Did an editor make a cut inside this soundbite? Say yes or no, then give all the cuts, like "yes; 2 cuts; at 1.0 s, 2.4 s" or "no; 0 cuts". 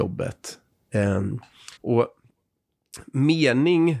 yes; 1 cut; at 1.8 s